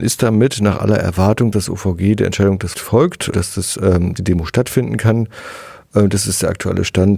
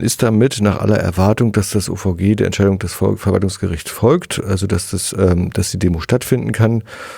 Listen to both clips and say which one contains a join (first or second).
first